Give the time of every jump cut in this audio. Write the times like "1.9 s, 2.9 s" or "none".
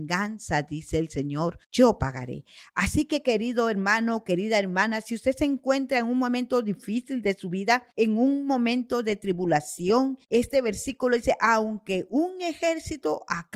1.6 s, 7.9 s, 10.2 s